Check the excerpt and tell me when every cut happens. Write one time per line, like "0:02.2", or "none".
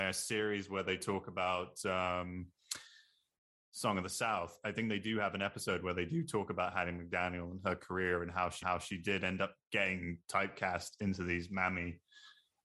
0:08.6